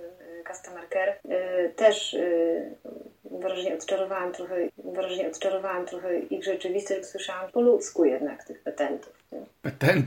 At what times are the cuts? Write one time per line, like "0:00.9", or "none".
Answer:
0:01.2
0:04.7
0:07.0
0:07.5